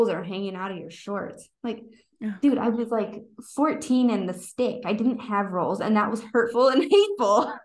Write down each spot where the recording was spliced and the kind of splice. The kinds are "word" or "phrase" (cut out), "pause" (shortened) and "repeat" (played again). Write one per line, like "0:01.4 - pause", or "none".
none